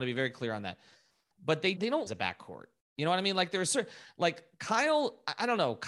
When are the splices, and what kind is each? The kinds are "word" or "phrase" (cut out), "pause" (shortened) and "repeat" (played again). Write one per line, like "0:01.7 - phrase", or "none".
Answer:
0:01.8 - word
0:02.1 - phrase